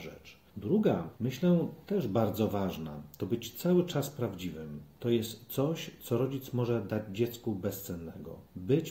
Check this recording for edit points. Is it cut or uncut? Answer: uncut